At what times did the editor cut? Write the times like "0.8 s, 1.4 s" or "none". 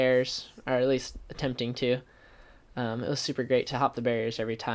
none

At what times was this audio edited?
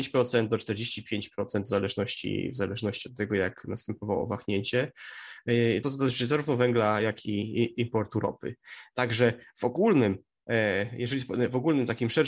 5.8 s

